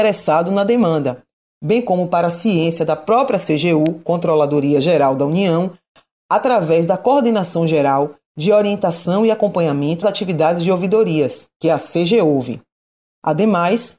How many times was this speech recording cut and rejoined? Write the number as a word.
one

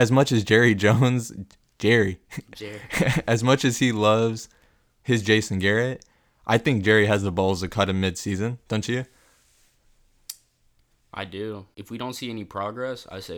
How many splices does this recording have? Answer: zero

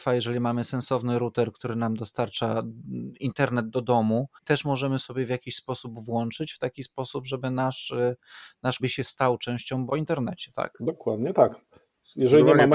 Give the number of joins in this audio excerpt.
three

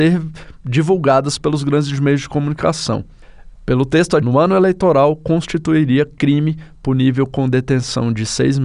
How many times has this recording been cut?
one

